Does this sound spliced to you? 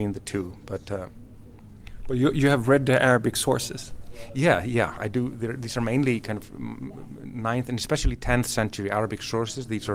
no; 0 cuts

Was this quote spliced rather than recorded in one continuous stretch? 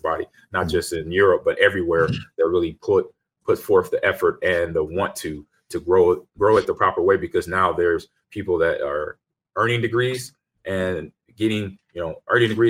no; 0 cuts

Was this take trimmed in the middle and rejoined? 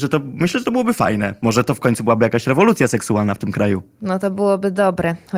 no; 0 cuts

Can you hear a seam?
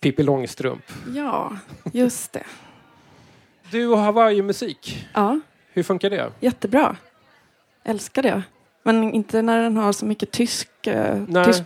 no; 0 cuts

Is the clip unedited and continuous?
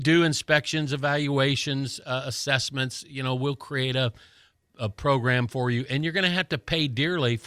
yes; 0 cuts

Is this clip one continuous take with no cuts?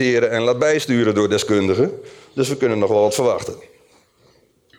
yes; 0 cuts

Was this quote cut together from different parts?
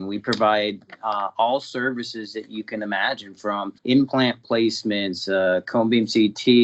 yes; 1 cut; at 3.8 s

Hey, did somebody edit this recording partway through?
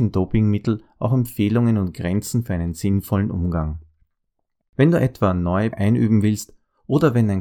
yes; 1 cut; at 5.7 s

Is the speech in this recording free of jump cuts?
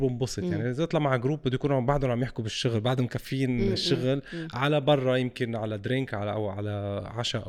yes; 0 cuts

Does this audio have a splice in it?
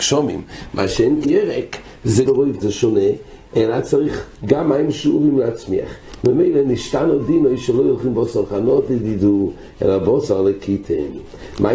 yes; 3 cuts; at 1.2 s, 2.3 s, 2.6 s

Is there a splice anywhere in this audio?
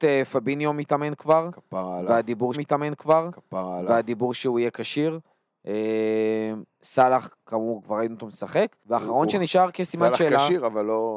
yes; 2 cuts; at 2.5 s, 8.8 s

